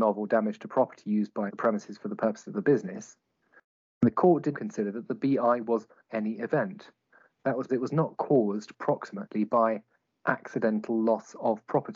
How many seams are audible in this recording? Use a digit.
4